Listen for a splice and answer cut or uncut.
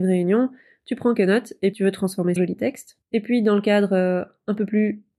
cut